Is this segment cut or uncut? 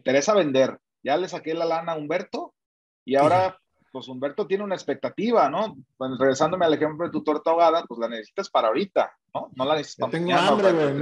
cut